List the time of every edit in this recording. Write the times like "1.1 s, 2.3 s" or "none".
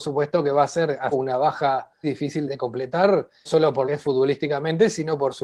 1.1 s, 2.0 s, 2.5 s, 3.5 s, 3.9 s